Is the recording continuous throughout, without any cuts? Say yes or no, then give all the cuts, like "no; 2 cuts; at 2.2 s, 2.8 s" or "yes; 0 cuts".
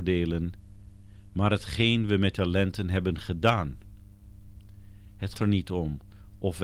no; 2 cuts; at 2.3 s, 5.3 s